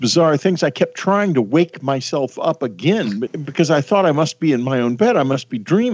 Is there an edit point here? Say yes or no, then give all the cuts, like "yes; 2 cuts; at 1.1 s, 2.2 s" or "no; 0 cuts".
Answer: yes; 1 cut; at 3.3 s